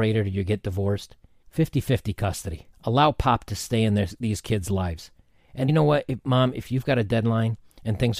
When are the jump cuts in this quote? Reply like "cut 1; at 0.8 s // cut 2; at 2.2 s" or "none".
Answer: cut 1; at 1.4 s // cut 2; at 2.7 s // cut 3; at 5.7 s